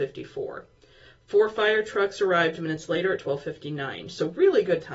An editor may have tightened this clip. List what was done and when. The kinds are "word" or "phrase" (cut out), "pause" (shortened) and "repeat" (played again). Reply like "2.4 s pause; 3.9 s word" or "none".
none